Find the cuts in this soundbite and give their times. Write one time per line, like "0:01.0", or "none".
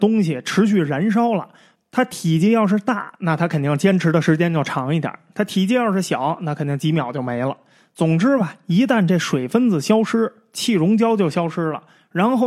none

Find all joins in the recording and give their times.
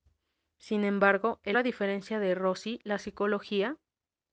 0:01.5

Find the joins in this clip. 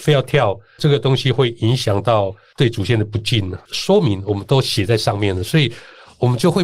none

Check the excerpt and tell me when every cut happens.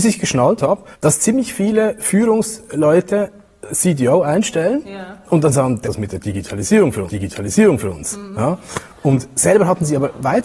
0:00.9
0:03.7
0:05.8
0:07.1

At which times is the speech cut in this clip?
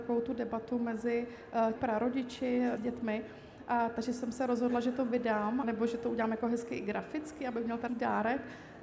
0:01.7
0:02.8
0:05.6
0:07.9

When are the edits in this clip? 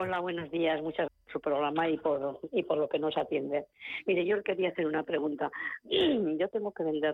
0:01.1

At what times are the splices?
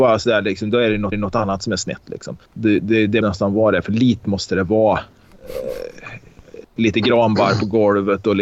0:01.1
0:02.5
0:03.2
0:04.2

